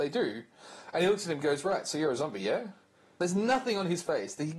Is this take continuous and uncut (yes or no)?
yes